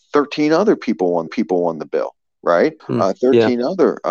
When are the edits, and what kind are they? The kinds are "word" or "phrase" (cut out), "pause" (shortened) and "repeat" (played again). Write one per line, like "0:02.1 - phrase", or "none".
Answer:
0:01.3 - repeat
0:02.8 - pause